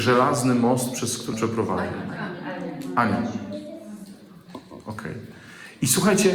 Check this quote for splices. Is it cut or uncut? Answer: cut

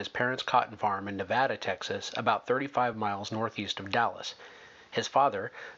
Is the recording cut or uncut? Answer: uncut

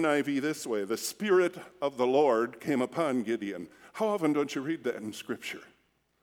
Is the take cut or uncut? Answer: uncut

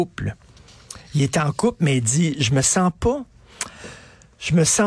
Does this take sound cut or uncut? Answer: uncut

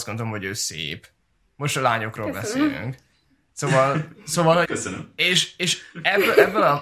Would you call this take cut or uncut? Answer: cut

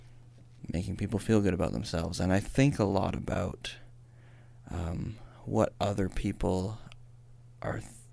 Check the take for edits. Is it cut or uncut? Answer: uncut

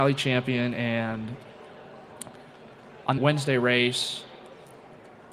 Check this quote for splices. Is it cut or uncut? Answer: cut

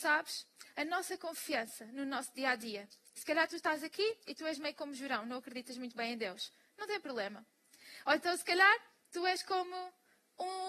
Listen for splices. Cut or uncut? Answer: uncut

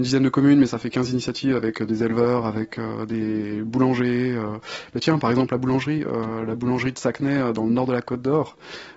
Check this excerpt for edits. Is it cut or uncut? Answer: uncut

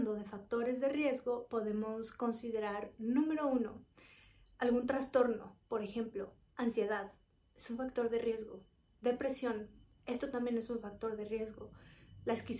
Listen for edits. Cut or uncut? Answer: uncut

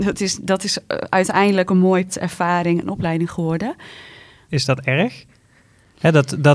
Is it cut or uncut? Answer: cut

